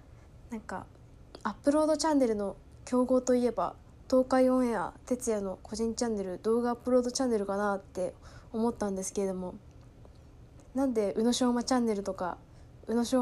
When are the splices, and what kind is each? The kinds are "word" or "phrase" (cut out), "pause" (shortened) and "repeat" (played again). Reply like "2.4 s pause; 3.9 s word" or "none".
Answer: 7.9 s pause